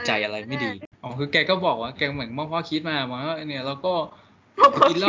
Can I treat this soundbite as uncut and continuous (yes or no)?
no